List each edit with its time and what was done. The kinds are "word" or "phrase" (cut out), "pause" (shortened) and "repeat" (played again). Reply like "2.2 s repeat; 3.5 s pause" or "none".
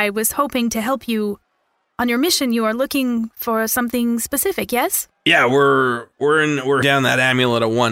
6.1 s pause; 6.8 s word